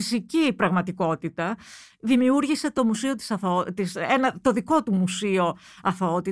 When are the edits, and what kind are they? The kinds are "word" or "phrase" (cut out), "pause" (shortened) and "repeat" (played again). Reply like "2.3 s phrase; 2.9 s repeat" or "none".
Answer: none